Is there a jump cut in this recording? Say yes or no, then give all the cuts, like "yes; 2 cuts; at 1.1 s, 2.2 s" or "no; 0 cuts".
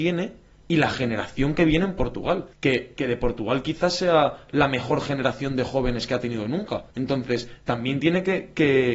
yes; 2 cuts; at 2.5 s, 6.9 s